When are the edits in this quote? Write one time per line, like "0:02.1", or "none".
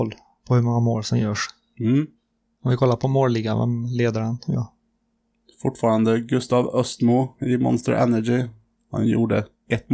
none